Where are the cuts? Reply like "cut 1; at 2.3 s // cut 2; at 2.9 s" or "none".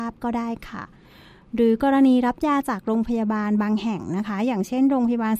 none